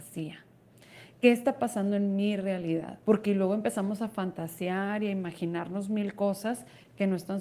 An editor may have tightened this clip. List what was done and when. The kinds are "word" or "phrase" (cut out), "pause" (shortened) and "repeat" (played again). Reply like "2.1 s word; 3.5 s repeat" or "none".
3.0 s pause